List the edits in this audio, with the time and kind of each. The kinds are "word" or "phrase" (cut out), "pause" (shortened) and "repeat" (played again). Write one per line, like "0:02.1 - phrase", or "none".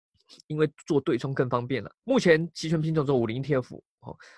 0:02.0 - pause

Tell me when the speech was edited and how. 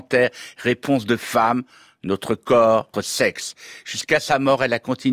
0:02.9 - word

